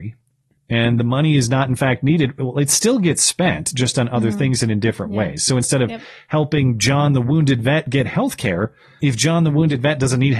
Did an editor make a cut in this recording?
yes; 1 cut; at 9.0 s

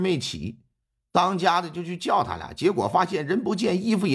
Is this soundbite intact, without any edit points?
yes; 0 cuts

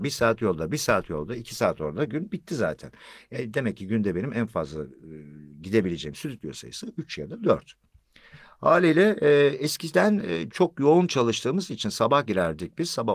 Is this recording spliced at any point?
no; 0 cuts

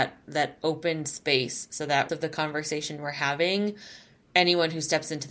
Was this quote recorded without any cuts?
no; 1 cut; at 2.1 s

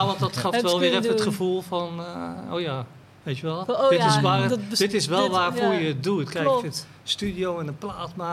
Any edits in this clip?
no; 0 cuts

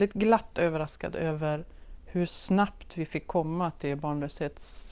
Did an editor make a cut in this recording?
no; 0 cuts

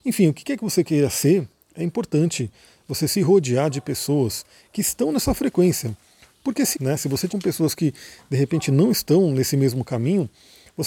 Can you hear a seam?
yes; 2 cuts; at 6.7 s, 7.3 s

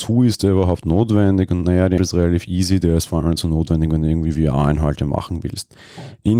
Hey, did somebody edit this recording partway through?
yes; 1 cut; at 2.0 s

